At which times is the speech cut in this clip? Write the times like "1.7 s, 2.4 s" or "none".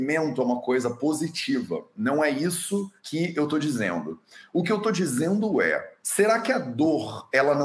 3.0 s, 6.0 s